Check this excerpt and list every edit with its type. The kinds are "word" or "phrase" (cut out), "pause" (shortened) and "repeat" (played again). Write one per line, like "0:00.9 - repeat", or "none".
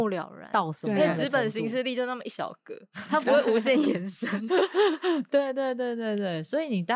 0:04.5 - word